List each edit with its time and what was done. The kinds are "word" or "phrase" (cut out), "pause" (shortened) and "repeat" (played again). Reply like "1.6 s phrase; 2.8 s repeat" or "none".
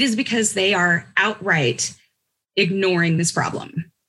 none